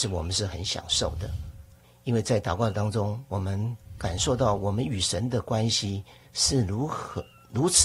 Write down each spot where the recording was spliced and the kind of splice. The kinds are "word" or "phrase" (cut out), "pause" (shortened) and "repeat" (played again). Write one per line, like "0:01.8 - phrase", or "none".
0:01.8 - pause